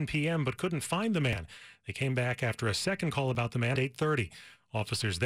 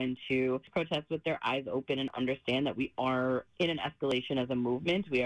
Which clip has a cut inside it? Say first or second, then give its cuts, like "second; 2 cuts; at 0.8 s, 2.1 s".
first; 1 cut; at 3.8 s